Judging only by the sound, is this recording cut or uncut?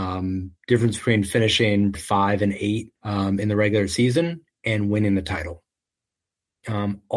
cut